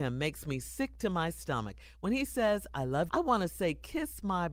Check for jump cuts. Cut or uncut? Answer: cut